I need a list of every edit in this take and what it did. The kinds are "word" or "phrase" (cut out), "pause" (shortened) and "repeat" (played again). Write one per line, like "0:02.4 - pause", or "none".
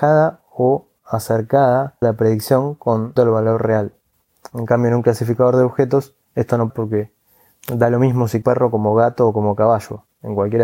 0:02.0 - word
0:03.2 - word
0:06.7 - word
0:08.4 - phrase